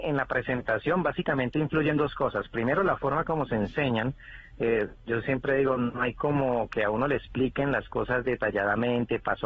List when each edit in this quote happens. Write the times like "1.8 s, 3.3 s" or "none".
none